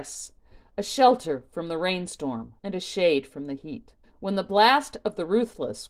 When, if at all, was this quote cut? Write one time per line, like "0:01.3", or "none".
0:02.6
0:04.0